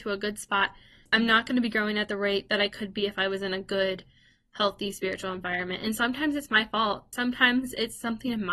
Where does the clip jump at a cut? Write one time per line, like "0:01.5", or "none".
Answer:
none